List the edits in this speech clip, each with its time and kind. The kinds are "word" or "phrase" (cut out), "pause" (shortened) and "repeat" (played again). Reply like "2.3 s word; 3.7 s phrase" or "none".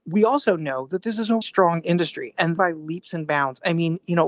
1.4 s word; 2.6 s phrase